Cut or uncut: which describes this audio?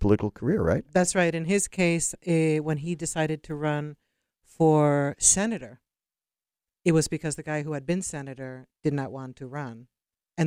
uncut